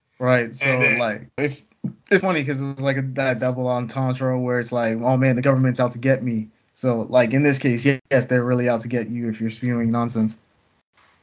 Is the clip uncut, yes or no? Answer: no